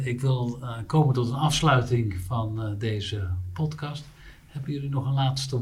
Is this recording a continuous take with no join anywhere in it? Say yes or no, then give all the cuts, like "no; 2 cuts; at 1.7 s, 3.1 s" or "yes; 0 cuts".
yes; 0 cuts